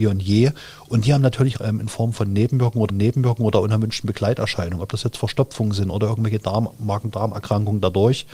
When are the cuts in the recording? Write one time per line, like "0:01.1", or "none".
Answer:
0:01.6
0:02.9